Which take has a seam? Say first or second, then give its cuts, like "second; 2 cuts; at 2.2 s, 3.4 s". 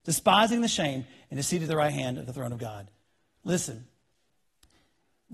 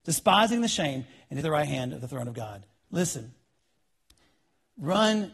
second; 2 cuts; at 1.4 s, 2.8 s